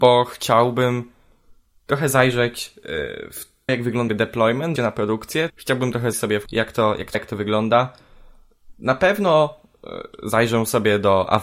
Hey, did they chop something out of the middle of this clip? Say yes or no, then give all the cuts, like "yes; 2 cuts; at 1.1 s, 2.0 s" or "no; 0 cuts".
yes; 7 cuts; at 3.7 s, 4.1 s, 4.8 s, 5.5 s, 6.1 s, 6.5 s, 7.1 s